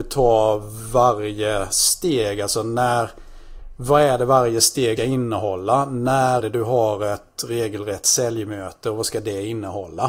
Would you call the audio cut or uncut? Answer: cut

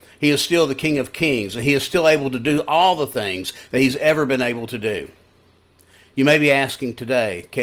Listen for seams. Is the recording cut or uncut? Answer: uncut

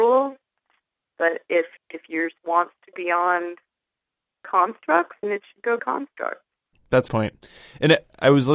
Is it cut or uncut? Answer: cut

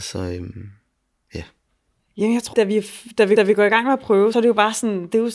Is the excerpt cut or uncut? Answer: cut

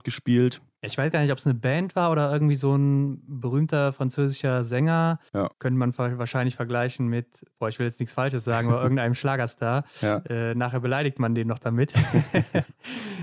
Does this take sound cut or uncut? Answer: cut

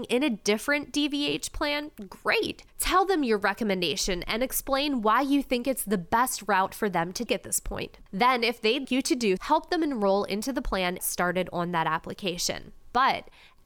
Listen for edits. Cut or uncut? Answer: cut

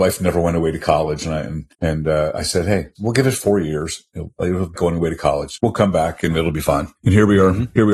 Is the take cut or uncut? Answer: cut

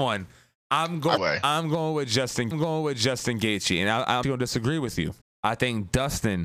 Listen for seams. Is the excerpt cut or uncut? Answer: cut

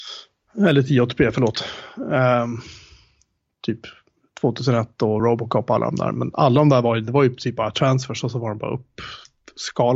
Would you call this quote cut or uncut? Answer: uncut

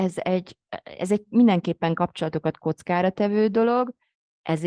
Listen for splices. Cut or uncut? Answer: uncut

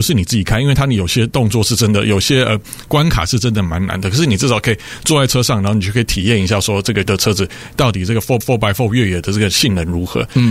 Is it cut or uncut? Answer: cut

